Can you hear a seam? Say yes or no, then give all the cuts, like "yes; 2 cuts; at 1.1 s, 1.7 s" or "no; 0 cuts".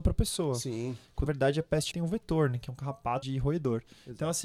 yes; 3 cuts; at 1.3 s, 1.9 s, 3.2 s